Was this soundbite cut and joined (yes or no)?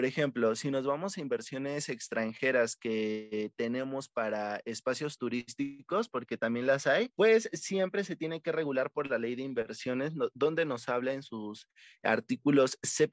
yes